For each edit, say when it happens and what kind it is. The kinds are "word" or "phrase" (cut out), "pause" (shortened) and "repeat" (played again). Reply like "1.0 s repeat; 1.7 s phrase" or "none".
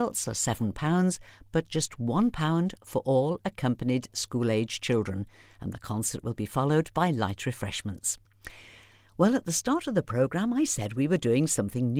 none